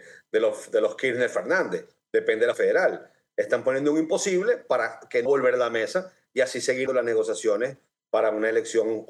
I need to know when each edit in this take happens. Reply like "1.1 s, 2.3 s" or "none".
2.5 s, 5.3 s, 6.9 s